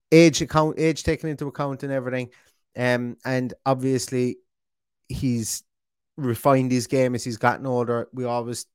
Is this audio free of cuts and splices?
yes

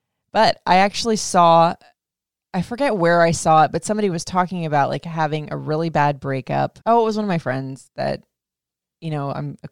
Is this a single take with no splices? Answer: no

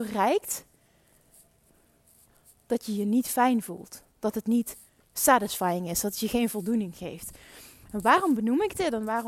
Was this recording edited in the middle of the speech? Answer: no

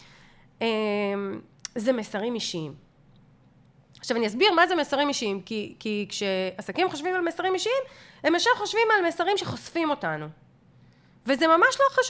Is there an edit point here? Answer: no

